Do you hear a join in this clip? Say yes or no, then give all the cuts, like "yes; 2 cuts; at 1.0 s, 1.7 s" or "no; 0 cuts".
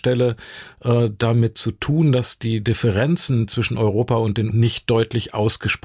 yes; 1 cut; at 4.5 s